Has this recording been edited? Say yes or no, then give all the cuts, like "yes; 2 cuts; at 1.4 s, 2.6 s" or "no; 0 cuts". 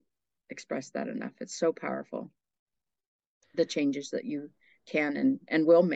no; 0 cuts